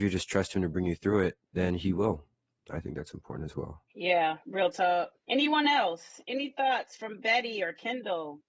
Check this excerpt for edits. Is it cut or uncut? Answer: cut